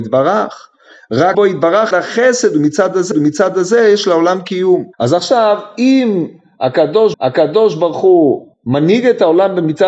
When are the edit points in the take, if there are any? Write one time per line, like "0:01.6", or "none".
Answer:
0:01.3
0:01.9
0:03.1
0:04.9
0:07.1
0:08.5